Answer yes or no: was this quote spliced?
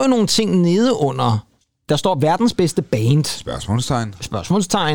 no